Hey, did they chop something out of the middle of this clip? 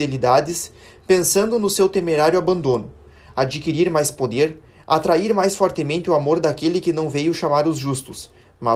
no; 0 cuts

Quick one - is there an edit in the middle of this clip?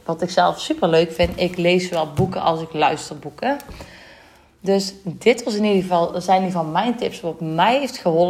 no; 0 cuts

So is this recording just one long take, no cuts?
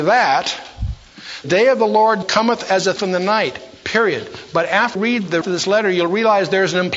no; 5 cuts; at 1.4 s, 2.2 s, 3.0 s, 5.0 s, 5.4 s

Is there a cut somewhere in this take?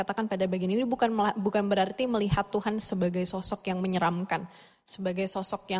no; 0 cuts

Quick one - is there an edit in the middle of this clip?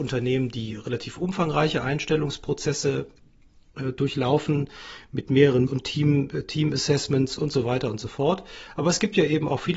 yes; 1 cut; at 5.7 s

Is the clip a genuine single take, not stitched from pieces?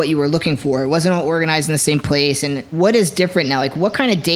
yes; 0 cuts

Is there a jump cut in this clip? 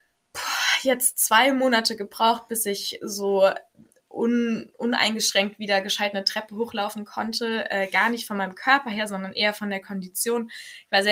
no; 0 cuts

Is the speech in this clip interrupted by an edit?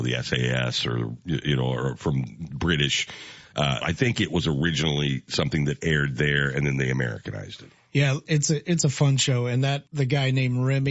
yes; 2 cuts; at 3.8 s, 9.9 s

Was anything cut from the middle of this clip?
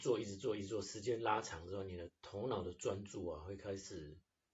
yes; 1 cut; at 2.2 s

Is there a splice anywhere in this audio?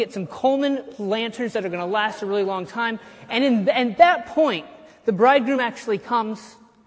no; 0 cuts

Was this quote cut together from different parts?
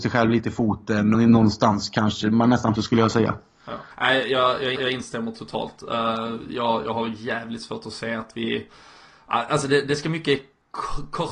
yes; 4 cuts; at 1.1 s, 2.8 s, 3.9 s, 4.8 s

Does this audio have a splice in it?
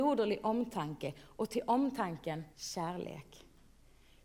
yes; 1 cut; at 2.5 s

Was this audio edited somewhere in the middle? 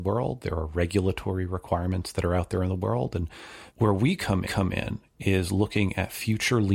yes; 2 cuts; at 3.7 s, 4.4 s

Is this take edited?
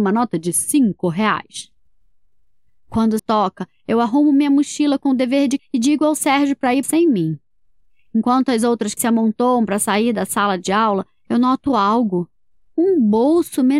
yes; 4 cuts; at 3.2 s, 5.6 s, 6.8 s, 9.0 s

